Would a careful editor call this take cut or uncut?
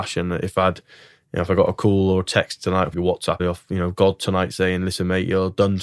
cut